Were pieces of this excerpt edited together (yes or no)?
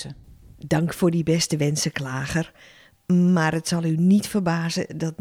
no